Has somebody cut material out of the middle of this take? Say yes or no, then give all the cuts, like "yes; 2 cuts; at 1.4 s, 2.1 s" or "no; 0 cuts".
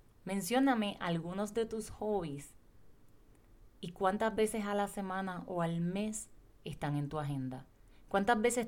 no; 0 cuts